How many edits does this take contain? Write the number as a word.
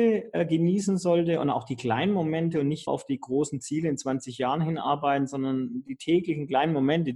one